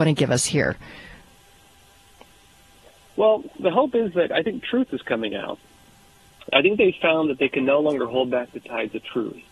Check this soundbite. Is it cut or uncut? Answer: uncut